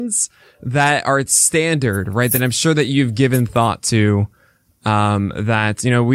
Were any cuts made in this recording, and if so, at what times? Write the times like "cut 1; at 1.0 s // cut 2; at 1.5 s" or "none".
none